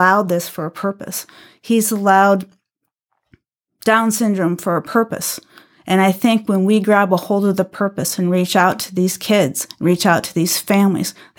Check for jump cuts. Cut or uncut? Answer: uncut